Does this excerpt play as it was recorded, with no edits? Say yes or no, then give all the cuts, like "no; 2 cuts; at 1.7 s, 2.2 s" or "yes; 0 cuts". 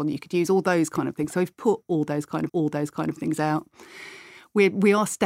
no; 1 cut; at 2.5 s